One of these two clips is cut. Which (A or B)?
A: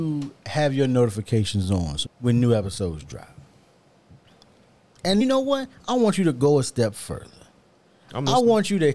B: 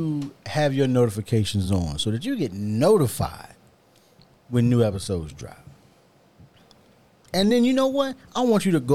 A